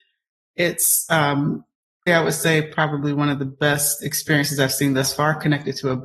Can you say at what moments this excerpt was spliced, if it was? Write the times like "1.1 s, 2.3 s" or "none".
2.1 s